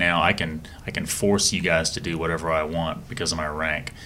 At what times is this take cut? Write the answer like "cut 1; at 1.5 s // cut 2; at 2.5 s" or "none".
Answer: none